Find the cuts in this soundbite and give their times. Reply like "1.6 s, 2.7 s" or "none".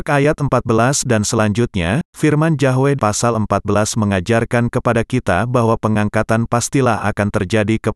2.1 s, 3.0 s